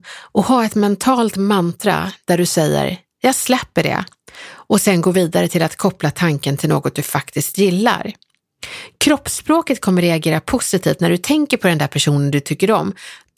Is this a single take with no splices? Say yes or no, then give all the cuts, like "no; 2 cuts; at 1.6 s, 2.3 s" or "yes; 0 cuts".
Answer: yes; 0 cuts